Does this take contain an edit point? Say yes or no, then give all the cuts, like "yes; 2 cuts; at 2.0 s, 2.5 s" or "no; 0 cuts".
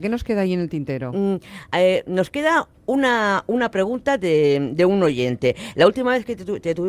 no; 0 cuts